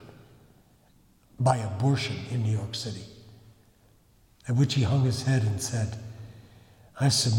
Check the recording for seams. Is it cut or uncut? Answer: uncut